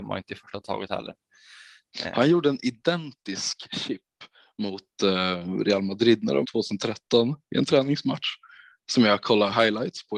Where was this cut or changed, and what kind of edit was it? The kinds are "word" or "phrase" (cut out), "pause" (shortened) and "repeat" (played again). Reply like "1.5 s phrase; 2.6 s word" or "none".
6.4 s word